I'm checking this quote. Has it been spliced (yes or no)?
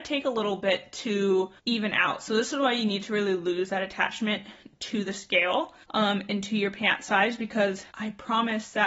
yes